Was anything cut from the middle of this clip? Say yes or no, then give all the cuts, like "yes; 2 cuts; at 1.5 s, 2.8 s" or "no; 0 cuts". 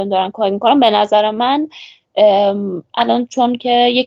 no; 0 cuts